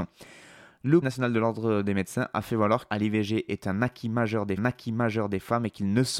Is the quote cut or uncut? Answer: cut